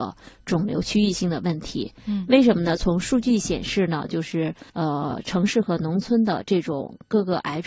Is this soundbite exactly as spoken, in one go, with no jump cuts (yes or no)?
no